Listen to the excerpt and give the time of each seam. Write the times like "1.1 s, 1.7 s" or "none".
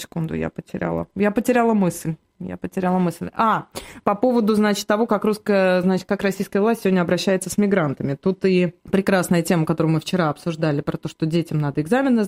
8.8 s